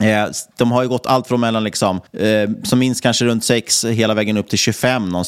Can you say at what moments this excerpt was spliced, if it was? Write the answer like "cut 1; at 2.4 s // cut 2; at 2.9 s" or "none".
cut 1; at 2.1 s